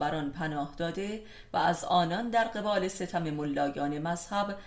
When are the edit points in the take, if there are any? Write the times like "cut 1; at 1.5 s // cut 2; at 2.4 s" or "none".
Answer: none